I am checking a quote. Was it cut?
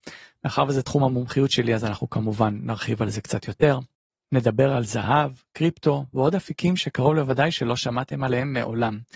no; 0 cuts

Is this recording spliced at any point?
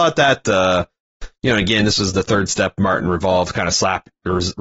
no; 0 cuts

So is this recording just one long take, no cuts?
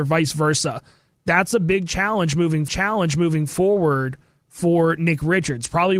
no; 1 cut; at 2.7 s

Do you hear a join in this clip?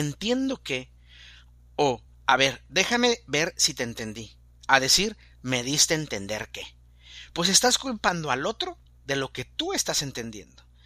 no; 0 cuts

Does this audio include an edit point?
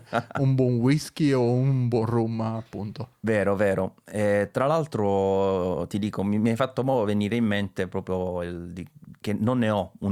no; 0 cuts

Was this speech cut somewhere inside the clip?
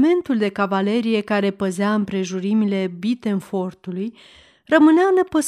no; 0 cuts

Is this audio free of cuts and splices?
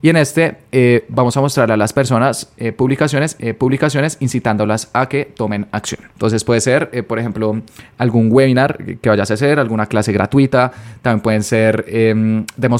no; 2 cuts; at 3.4 s, 6.1 s

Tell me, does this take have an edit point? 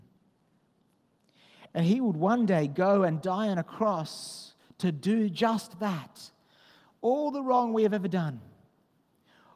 no; 0 cuts

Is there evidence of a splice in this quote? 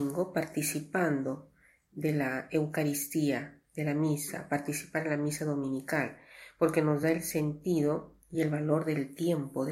no; 0 cuts

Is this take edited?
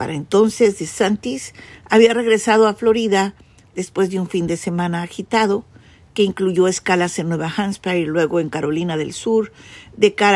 no; 0 cuts

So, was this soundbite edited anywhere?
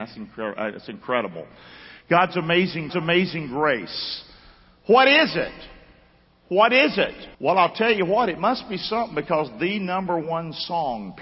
yes; 2 cuts; at 2.9 s, 7.3 s

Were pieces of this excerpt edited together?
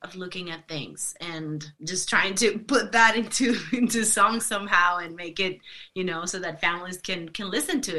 yes; 1 cut; at 1.7 s

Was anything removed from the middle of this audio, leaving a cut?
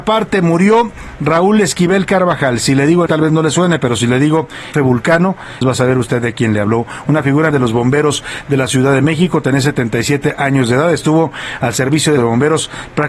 yes; 5 cuts; at 3.1 s, 4.7 s, 5.6 s, 7.5 s, 12.2 s

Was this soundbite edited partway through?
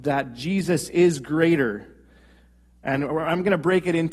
no; 0 cuts

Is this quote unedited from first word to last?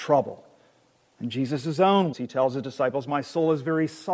no; 1 cut; at 2.1 s

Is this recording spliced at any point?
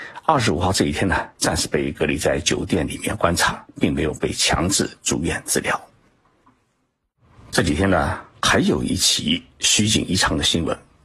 no; 0 cuts

